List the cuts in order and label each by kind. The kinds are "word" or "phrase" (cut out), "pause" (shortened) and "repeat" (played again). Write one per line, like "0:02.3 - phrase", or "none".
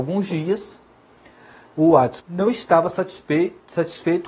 0:02.2 - word

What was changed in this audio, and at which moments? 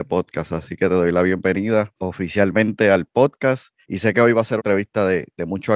0:02.0 - pause
0:03.8 - pause
0:04.6 - word

